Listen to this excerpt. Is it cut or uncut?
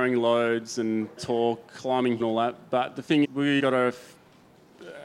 cut